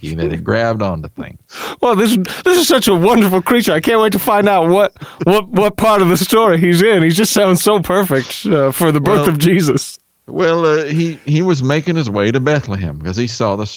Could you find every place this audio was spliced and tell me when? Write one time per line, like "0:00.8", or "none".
none